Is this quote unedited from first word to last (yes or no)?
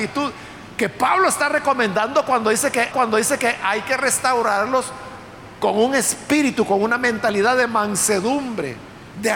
no